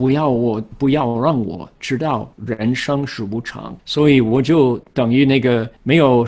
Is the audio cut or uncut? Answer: cut